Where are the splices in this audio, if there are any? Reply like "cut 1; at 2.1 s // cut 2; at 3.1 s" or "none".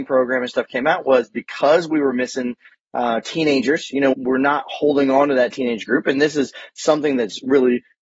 cut 1; at 4.1 s